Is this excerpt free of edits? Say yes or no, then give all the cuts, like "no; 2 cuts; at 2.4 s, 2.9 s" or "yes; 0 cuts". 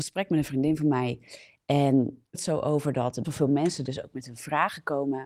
no; 2 cuts; at 2.3 s, 3.2 s